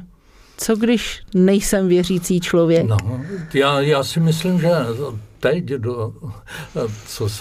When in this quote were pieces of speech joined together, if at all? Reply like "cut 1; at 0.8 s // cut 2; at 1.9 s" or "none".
none

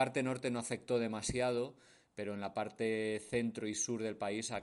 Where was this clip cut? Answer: none

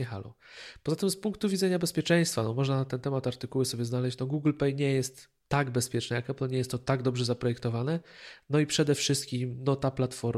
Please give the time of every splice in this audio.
cut 1; at 5.4 s

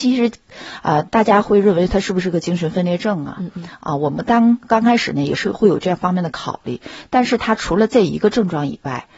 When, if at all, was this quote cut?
cut 1; at 4.6 s

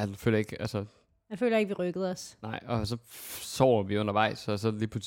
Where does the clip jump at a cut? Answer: none

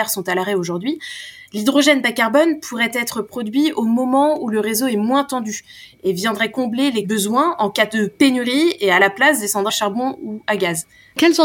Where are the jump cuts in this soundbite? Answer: cut 1; at 9.7 s

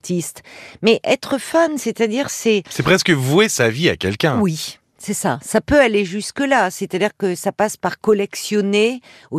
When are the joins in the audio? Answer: none

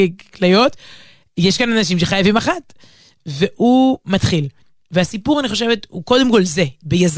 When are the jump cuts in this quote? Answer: none

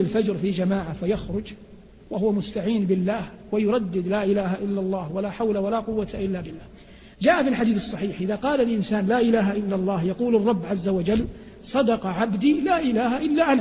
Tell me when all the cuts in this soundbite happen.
cut 1; at 2.1 s // cut 2; at 7.1 s

